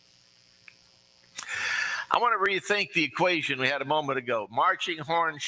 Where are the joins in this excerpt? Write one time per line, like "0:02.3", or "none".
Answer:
none